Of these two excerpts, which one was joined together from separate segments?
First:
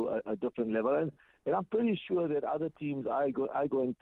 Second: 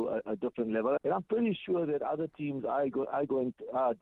second; 1 cut; at 1.0 s

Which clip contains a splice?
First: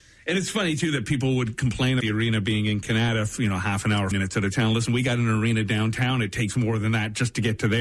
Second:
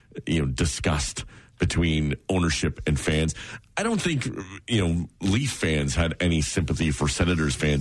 first; 2 cuts; at 2.0 s, 4.1 s

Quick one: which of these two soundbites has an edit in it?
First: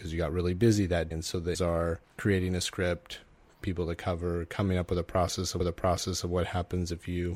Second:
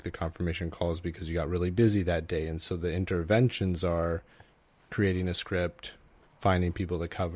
first; 5 cuts; at 1.1 s, 1.5 s, 2.0 s, 3.6 s, 5.6 s

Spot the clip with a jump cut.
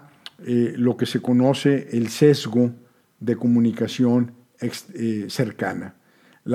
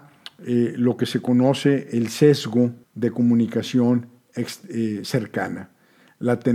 second; 1 cut; at 2.8 s

